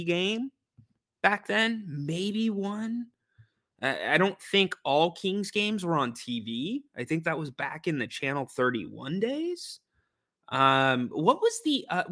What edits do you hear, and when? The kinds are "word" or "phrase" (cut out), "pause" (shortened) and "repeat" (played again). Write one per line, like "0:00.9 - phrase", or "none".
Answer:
none

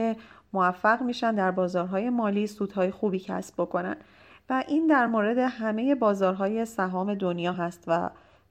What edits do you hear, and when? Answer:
none

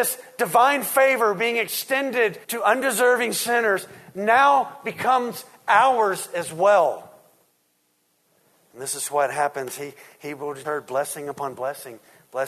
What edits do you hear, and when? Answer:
0:02.4 - pause
0:10.6 - word

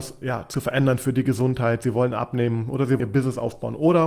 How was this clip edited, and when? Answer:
0:03.0 - word

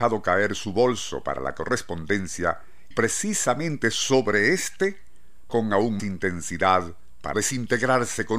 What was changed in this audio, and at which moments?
0:02.9 - word
0:05.5 - word
0:06.0 - word
0:07.3 - word

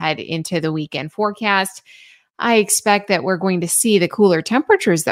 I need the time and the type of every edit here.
none

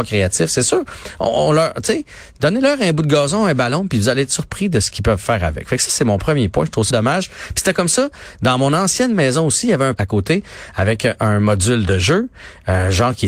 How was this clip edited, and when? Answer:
0:06.9 - word
0:10.0 - word

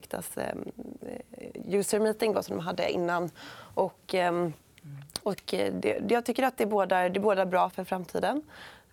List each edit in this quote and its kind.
0:07.7 - word

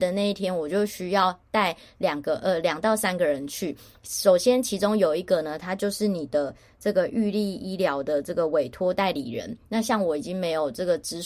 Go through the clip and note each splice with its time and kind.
none

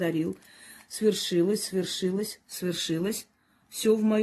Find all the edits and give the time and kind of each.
none

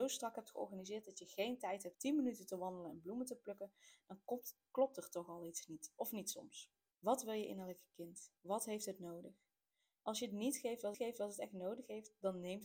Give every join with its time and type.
0:01.9 - word
0:06.9 - pause
0:08.4 - pause
0:10.9 - repeat

